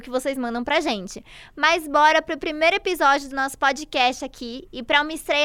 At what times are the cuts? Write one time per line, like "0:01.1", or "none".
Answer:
none